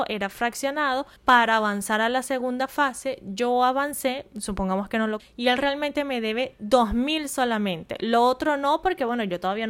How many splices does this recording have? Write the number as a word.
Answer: two